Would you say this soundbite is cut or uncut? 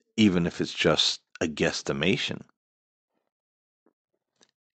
cut